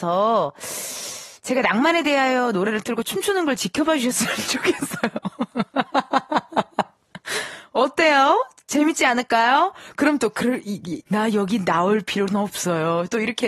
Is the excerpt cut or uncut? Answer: cut